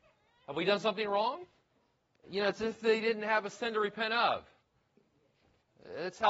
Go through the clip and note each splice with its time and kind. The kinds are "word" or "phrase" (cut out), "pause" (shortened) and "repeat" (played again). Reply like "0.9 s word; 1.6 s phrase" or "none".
1.7 s pause